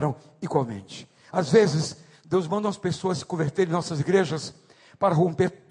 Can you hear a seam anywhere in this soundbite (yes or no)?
no